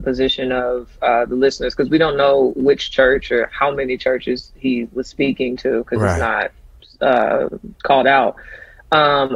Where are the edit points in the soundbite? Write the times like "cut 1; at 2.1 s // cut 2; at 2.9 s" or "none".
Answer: cut 1; at 7.7 s